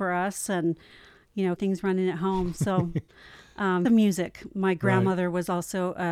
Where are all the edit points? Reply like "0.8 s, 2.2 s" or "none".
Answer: 1.6 s, 3.1 s, 3.8 s